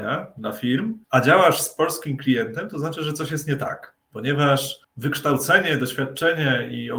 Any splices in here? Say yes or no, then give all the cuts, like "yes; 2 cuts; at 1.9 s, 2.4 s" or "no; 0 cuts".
yes; 1 cut; at 1.0 s